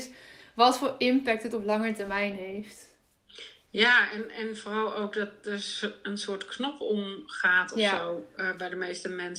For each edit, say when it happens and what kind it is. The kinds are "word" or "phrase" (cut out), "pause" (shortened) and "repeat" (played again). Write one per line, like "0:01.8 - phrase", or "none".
0:01.5 - word